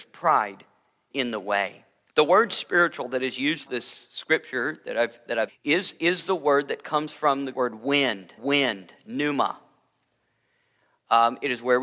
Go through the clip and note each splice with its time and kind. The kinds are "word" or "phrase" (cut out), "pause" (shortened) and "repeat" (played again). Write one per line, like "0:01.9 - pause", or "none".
0:01.1 - word
0:02.1 - pause
0:03.7 - word
0:05.5 - phrase
0:07.5 - word
0:08.4 - repeat